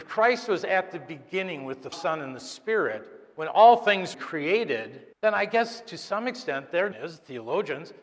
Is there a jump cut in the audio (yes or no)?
yes